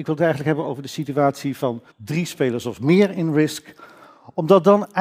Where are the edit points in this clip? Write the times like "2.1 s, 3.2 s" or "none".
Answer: 1.9 s